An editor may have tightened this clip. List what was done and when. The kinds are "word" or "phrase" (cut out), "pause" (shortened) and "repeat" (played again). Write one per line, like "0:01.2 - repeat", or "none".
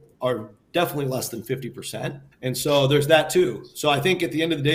0:02.3 - pause